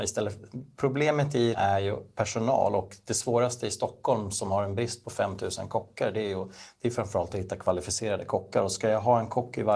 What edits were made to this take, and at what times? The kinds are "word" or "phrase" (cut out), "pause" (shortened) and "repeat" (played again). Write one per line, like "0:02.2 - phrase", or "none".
0:01.5 - word